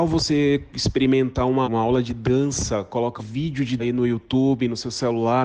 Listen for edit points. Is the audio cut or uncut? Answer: cut